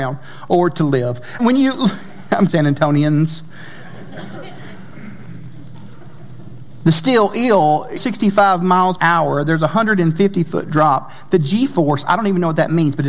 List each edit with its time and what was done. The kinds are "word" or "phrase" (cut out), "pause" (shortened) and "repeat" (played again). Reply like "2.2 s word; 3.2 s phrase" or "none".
1.4 s word; 2.5 s word; 8.0 s word; 9.0 s word